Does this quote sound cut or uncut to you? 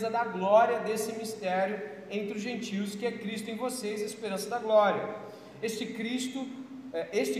uncut